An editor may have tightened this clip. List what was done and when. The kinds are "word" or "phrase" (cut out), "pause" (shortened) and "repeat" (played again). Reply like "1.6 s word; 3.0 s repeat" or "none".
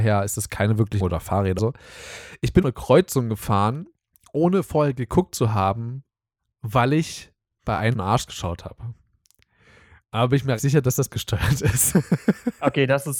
1.0 s word; 1.6 s word; 2.6 s word; 7.9 s word; 10.6 s word; 11.1 s word

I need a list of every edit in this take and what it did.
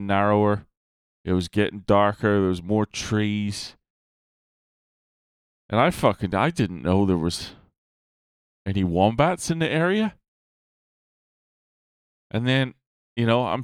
none

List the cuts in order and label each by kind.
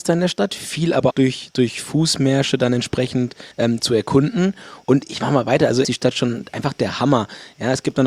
1.1 s word; 3.5 s pause; 5.8 s phrase

